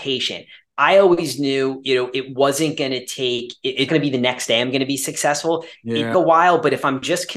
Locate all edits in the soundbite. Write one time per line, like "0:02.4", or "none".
0:03.9
0:06.1